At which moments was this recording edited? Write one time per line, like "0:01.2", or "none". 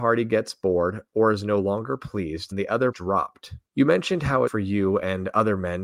0:02.5
0:02.9
0:03.7
0:04.5